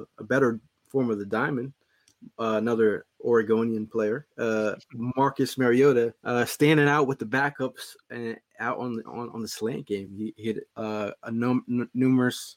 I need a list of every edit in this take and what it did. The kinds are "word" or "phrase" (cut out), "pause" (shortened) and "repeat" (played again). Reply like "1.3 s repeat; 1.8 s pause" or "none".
4.3 s pause; 6.2 s pause; 10.7 s pause